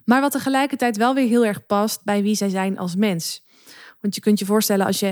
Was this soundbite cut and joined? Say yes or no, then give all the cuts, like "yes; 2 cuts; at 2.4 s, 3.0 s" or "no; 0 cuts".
no; 0 cuts